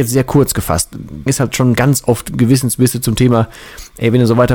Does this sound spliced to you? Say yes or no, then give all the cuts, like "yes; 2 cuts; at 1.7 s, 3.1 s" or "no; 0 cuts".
yes; 2 cuts; at 1.3 s, 1.8 s